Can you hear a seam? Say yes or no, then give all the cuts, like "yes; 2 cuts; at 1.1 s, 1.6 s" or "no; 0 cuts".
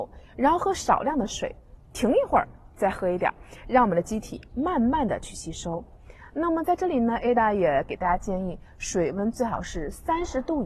no; 0 cuts